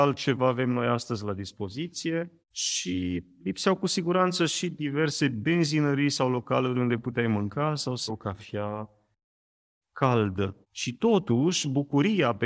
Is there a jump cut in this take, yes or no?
yes